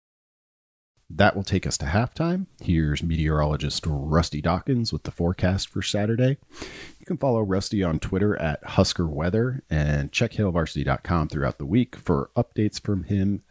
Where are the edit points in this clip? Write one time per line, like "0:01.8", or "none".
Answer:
0:02.5